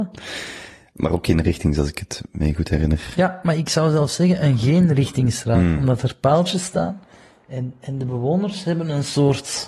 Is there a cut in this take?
no; 0 cuts

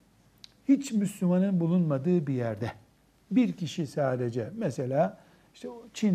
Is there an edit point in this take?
no; 0 cuts

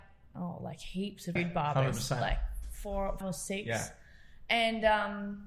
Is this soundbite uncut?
no; 2 cuts; at 1.4 s, 3.2 s

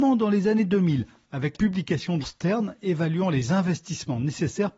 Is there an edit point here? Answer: yes; 2 cuts; at 1.5 s, 2.2 s

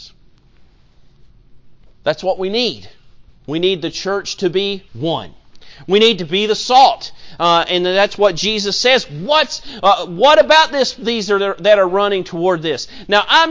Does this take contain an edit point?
yes; 3 cuts; at 1.9 s, 3.3 s, 4.9 s

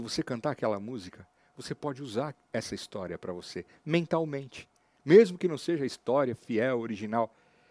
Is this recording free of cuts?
yes; 0 cuts

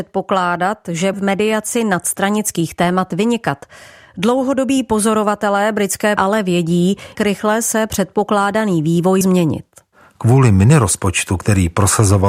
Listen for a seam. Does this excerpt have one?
yes; 4 cuts; at 1.1 s, 6.2 s, 7.1 s, 9.2 s

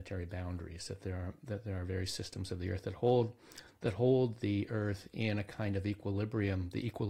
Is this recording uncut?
yes; 0 cuts

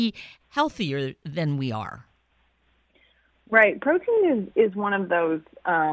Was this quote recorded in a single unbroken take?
yes; 0 cuts

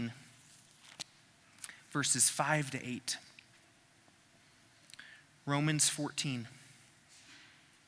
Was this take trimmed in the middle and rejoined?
no; 0 cuts

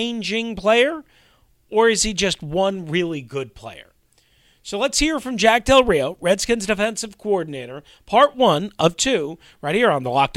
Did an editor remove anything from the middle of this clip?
no; 0 cuts

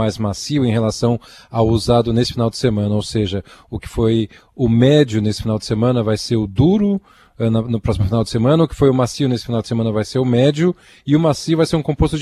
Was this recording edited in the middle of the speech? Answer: no; 0 cuts

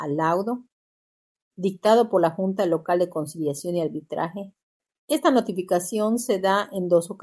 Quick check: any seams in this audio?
no; 0 cuts

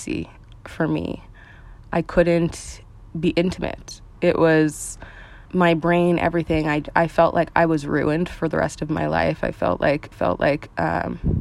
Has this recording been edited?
yes; 3 cuts; at 4.1 s, 5.5 s, 10.1 s

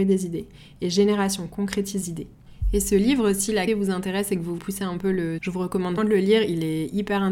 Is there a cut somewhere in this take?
yes; 5 cuts; at 2.0 s, 3.7 s, 4.6 s, 5.4 s, 6.0 s

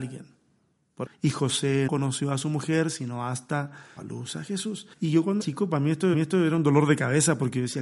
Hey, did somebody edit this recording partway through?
yes; 6 cuts; at 1.1 s, 1.9 s, 4.0 s, 4.9 s, 5.4 s, 6.1 s

